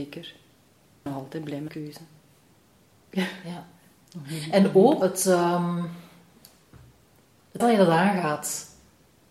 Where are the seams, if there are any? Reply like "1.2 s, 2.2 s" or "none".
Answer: 1.1 s, 1.7 s, 5.0 s, 7.6 s

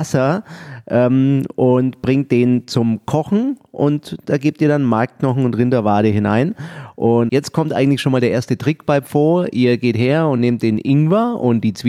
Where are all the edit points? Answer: 7.3 s

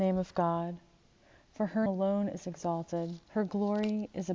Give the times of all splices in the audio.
1.9 s, 3.3 s

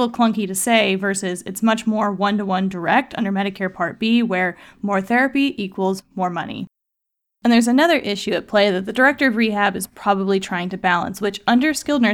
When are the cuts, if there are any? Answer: none

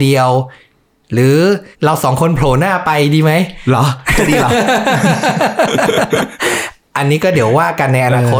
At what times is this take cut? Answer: 1.7 s

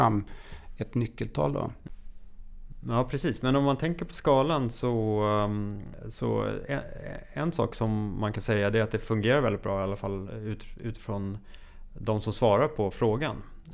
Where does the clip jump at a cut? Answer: none

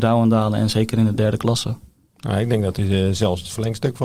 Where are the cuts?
none

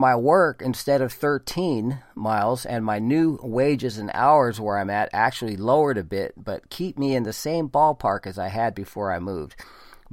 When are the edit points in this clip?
none

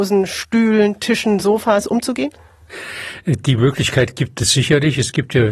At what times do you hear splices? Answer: none

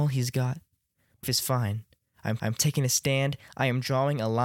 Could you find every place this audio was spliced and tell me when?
1.2 s, 2.4 s

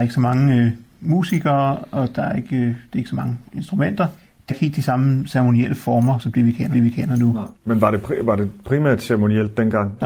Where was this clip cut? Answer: 4.5 s, 6.2 s, 6.7 s, 7.5 s

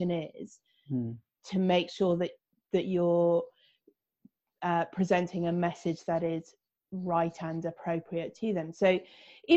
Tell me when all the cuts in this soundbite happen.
none

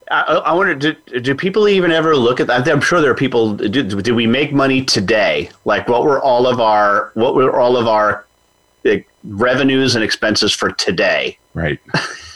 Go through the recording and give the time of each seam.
9.1 s, 11.4 s

